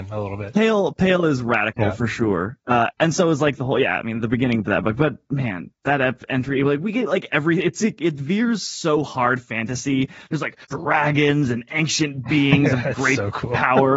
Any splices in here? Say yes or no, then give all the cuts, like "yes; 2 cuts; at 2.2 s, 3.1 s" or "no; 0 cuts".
yes; 1 cut; at 10.6 s